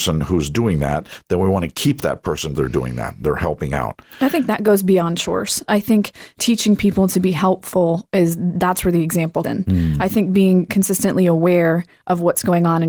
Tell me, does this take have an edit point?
yes; 2 cuts; at 2.5 s, 9.4 s

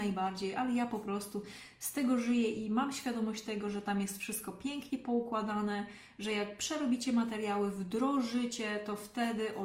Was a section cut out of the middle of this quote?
no; 0 cuts

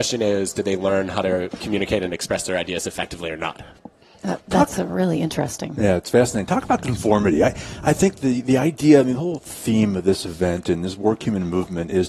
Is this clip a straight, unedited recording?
yes; 0 cuts

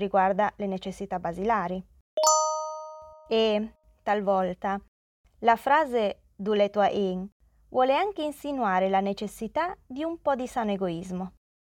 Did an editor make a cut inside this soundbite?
no; 0 cuts

